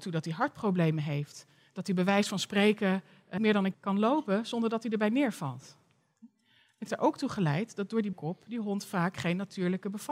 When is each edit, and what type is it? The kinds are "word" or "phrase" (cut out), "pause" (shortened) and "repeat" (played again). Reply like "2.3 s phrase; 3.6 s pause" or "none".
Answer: 3.4 s word; 3.7 s word; 6.9 s word; 8.1 s word